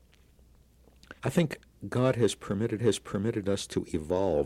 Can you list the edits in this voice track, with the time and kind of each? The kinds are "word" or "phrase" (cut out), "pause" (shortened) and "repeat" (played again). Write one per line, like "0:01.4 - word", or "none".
0:01.2 - pause
0:02.8 - repeat

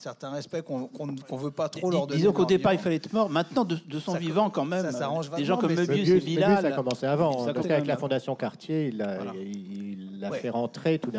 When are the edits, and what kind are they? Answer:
0:07.6 - word

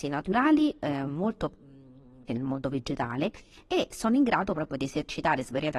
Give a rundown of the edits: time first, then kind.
0:02.3 - word

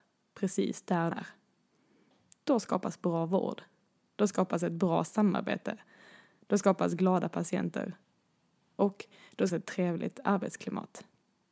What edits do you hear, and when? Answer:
0:01.1 - word
0:09.5 - word

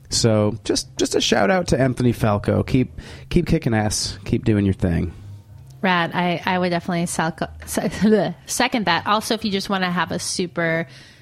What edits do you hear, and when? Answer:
none

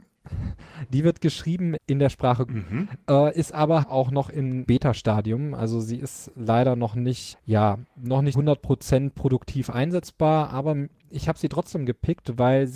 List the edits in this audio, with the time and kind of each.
0:01.8 - word
0:02.5 - word
0:03.8 - word
0:04.7 - word
0:07.3 - word
0:08.3 - word

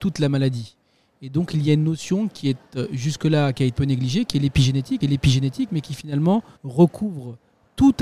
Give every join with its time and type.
0:03.8 - word
0:05.0 - repeat
0:06.6 - pause

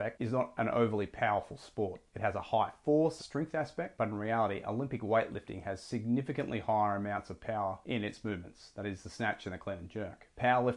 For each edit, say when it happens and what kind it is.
0:03.2 - phrase

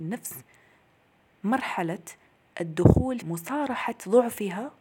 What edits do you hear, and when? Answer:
0:03.2 - word

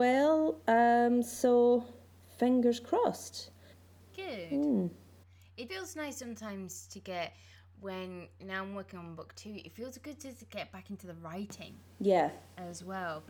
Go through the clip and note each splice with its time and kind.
0:05.7 - word

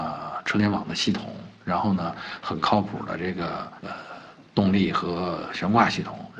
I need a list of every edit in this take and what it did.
0:03.8 - pause

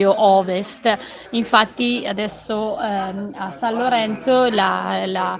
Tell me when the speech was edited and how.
none

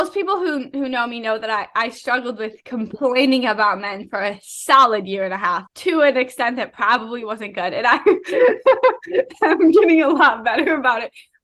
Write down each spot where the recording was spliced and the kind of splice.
0:05.7 - pause

